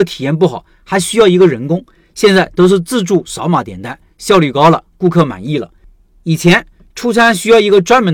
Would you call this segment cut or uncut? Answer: uncut